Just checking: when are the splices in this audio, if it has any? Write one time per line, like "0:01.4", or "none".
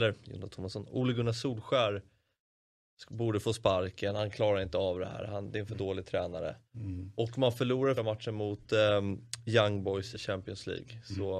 0:06.6
0:08.0
0:10.1